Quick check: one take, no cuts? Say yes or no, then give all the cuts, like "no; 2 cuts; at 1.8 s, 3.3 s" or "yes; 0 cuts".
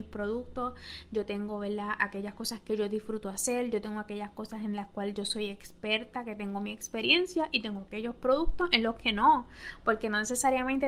yes; 0 cuts